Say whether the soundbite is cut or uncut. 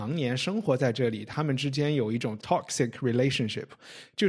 cut